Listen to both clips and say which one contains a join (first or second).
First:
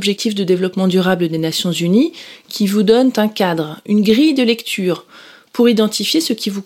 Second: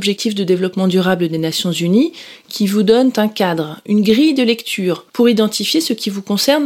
second